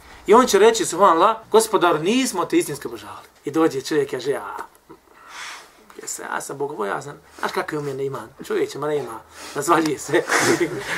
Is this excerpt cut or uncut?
cut